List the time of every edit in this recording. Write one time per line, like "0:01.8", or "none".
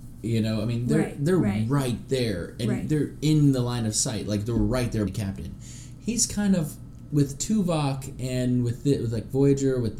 0:05.1
0:07.1